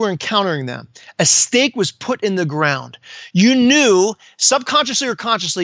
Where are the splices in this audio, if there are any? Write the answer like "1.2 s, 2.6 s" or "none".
none